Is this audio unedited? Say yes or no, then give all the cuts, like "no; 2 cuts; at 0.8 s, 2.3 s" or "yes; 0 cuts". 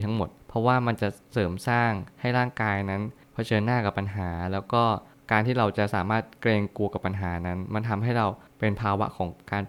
yes; 0 cuts